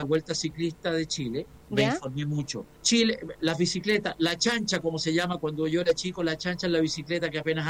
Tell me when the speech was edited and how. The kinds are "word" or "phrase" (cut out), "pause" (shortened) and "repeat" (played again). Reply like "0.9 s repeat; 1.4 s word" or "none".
1.6 s pause; 2.7 s pause